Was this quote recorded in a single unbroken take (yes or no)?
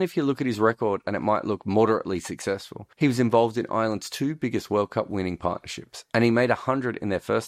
no